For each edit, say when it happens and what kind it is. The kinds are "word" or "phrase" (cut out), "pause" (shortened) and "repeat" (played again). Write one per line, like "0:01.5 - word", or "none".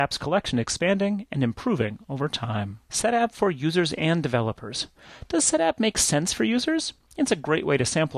0:02.8 - pause